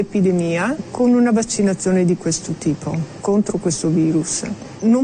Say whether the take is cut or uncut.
uncut